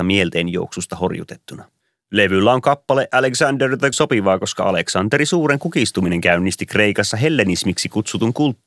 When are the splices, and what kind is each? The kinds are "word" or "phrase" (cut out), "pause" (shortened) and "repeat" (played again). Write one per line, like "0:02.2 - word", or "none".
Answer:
0:01.8 - pause
0:03.9 - phrase